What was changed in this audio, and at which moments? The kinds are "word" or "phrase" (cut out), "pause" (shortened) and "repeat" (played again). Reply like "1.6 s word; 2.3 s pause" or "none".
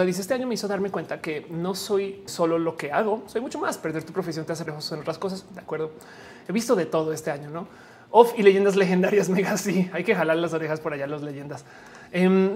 2.3 s word; 4.7 s word